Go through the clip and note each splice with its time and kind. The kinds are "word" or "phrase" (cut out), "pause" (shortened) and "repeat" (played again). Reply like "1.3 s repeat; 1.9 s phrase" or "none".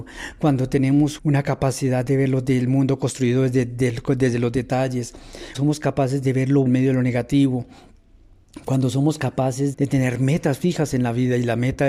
1.2 s word; 5.5 s word; 6.7 s word; 9.7 s word